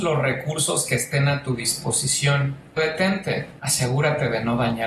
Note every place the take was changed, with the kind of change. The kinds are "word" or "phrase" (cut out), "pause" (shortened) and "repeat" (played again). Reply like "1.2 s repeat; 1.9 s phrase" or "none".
2.8 s word

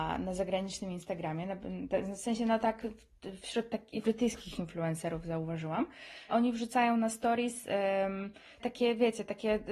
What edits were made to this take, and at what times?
4.0 s word; 6.3 s word; 8.6 s word

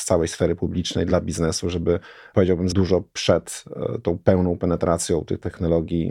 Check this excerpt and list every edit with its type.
2.7 s word

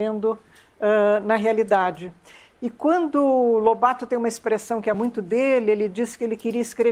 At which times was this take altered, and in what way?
none

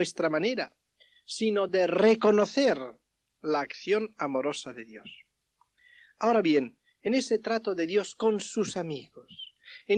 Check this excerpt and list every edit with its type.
none

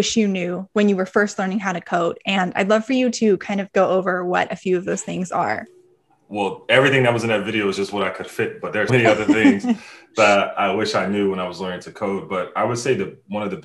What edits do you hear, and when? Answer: 6.1 s pause; 8.9 s word

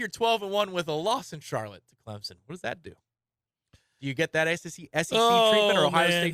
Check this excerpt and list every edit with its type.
none

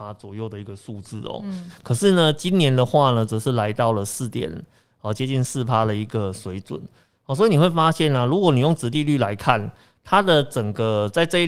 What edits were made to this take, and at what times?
none

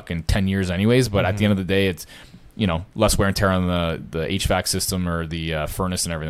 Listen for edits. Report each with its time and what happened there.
none

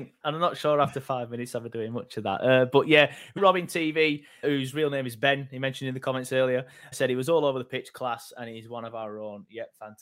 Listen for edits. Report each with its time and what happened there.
3.4 s word; 4.4 s word; 6.9 s word

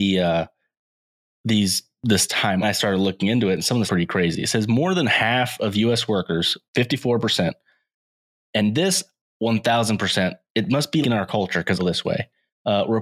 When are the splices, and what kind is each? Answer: 2.6 s phrase; 3.9 s phrase; 6.7 s pause; 11.0 s word; 11.8 s phrase

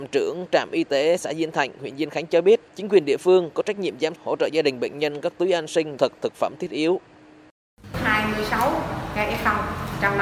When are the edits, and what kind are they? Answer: 2.7 s pause; 4.2 s word; 6.0 s phrase

